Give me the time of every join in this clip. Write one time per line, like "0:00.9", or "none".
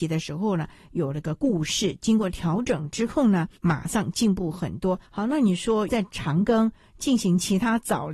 0:05.0